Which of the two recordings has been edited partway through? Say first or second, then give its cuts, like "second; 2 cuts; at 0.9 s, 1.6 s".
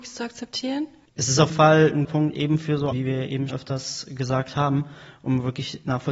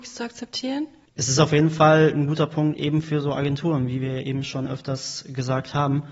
first; 4 cuts; at 1.5 s, 2.0 s, 2.9 s, 3.5 s